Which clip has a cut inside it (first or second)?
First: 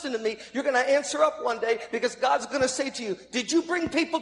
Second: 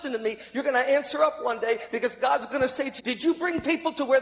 second